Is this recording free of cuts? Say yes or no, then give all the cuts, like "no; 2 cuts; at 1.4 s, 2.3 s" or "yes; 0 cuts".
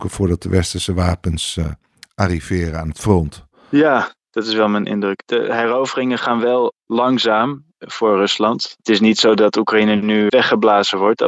no; 1 cut; at 10.3 s